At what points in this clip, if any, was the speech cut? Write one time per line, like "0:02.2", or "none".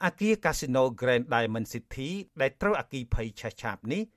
none

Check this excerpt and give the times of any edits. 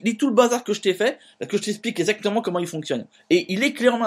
0:03.1

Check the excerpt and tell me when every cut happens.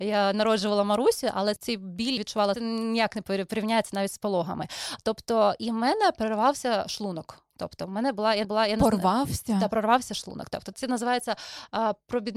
0:01.6
0:02.2
0:02.5
0:08.4
0:10.7

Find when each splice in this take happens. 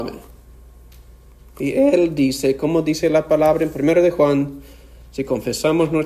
none

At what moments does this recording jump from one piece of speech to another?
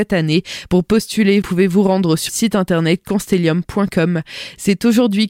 0:01.4
0:02.3

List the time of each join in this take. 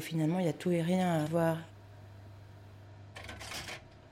0:01.3

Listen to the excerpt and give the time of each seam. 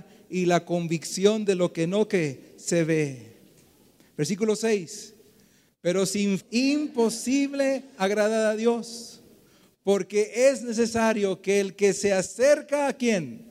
0:06.4

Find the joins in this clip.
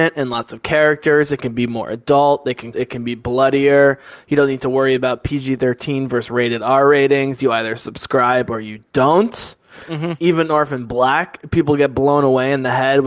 0:02.7

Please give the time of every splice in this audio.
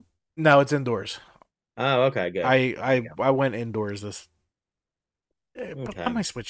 none

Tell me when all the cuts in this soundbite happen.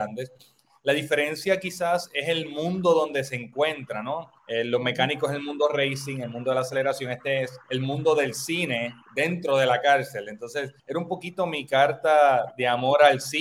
0:04.4
0:07.6
0:09.0
0:10.8

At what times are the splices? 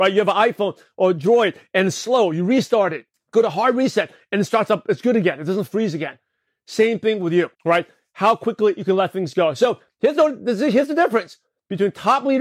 0:03.1
0:07.5

